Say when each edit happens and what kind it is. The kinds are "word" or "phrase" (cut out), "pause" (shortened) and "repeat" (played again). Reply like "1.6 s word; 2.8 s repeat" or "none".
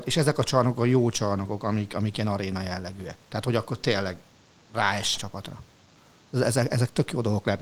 5.2 s phrase